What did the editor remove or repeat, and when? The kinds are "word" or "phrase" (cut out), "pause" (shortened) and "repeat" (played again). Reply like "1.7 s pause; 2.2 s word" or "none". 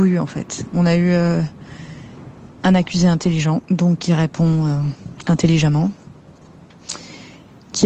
3.6 s pause